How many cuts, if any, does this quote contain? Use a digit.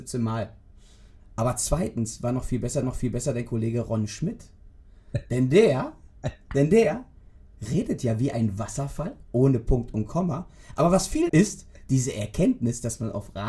3